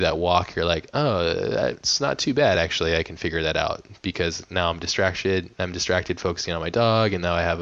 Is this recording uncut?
yes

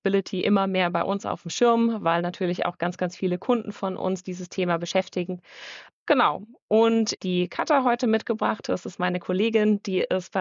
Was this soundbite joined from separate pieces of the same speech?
yes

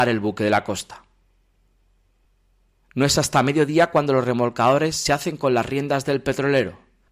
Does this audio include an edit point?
no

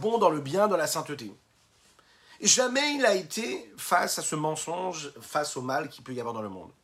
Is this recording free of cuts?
yes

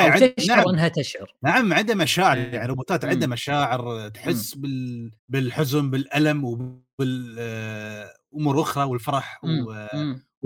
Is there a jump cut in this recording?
yes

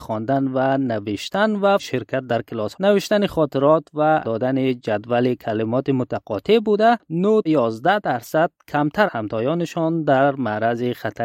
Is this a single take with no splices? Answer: no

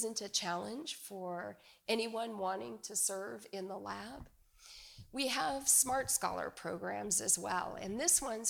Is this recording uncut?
yes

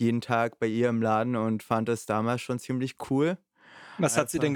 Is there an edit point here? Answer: no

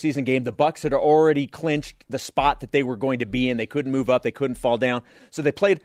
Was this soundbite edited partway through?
no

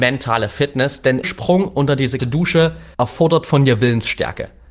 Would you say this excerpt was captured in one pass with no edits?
no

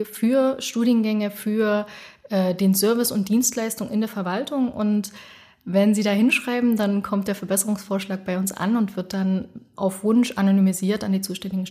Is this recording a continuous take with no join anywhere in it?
yes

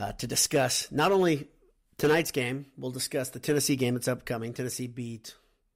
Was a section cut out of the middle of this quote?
no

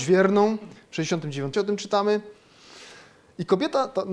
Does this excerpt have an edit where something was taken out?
yes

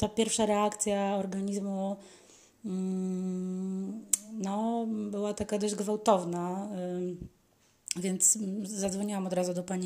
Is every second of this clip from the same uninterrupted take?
yes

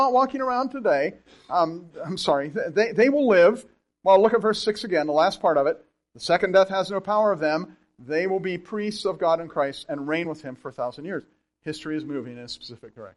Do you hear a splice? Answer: no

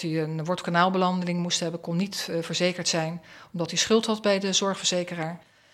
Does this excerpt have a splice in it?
no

